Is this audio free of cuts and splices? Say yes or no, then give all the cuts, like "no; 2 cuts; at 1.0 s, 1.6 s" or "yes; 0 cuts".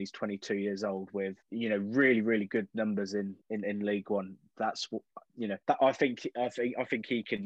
no; 3 cuts; at 1.4 s, 3.4 s, 5.6 s